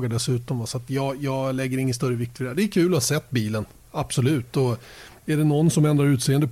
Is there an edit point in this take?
no; 0 cuts

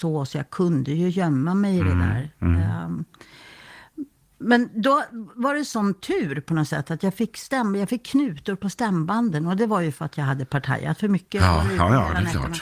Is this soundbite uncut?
yes; 0 cuts

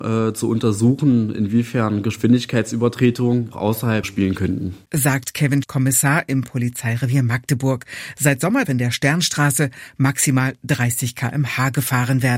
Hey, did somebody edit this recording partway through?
yes; 5 cuts; at 3.5 s, 4.0 s, 4.9 s, 5.6 s, 8.6 s

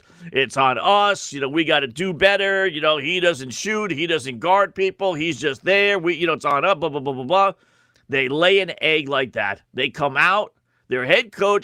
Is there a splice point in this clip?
yes; 1 cut; at 7.9 s

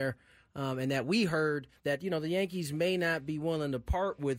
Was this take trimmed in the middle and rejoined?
yes; 1 cut; at 1.8 s

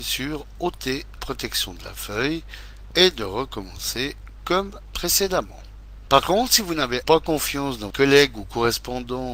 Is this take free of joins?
no; 3 cuts; at 1.2 s, 7.0 s, 7.9 s

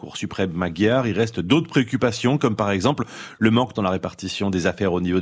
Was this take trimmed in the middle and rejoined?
yes; 1 cut; at 3.8 s

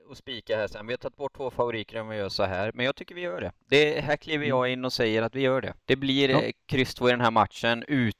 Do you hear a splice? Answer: yes; 1 cut; at 5.8 s

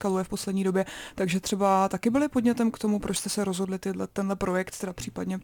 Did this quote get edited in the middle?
no; 0 cuts

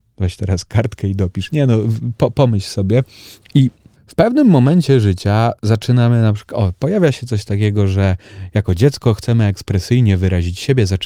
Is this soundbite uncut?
no; 2 cuts; at 3.9 s, 5.6 s

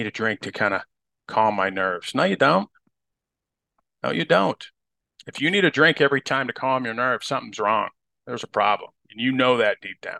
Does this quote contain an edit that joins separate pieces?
no; 0 cuts

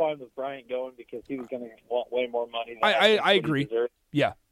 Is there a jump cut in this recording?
no; 0 cuts

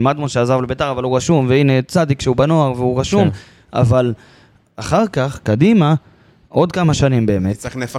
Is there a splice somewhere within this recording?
no; 0 cuts

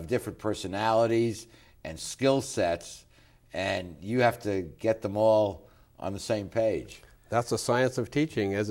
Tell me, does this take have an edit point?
no; 0 cuts

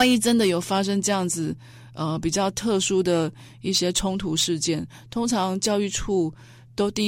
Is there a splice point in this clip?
no; 0 cuts

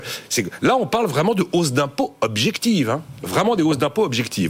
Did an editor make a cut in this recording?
no; 0 cuts

